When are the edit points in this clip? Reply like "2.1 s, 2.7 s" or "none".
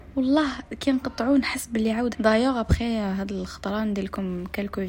2.1 s